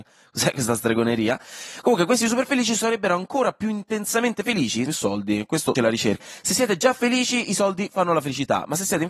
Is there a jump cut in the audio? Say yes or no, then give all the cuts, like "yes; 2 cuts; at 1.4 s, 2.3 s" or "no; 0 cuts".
yes; 3 cuts; at 4.9 s, 5.8 s, 6.2 s